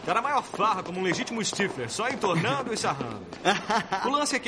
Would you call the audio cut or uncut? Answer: uncut